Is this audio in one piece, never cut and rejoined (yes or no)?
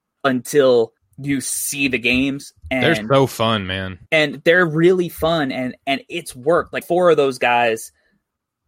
no